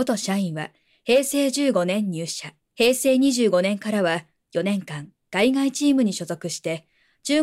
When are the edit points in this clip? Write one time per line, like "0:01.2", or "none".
0:02.6